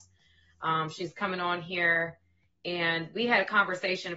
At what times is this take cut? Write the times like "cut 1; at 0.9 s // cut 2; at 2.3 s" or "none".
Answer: none

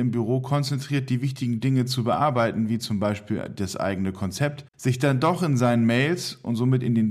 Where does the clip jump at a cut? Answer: cut 1; at 4.7 s

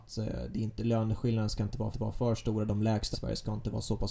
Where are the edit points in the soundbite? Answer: cut 1; at 1.9 s // cut 2; at 3.1 s

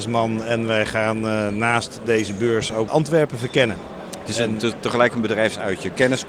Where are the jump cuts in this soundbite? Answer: cut 1; at 2.9 s

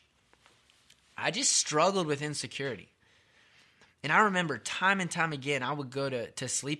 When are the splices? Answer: none

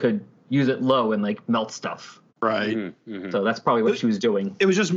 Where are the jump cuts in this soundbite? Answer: cut 1; at 2.3 s

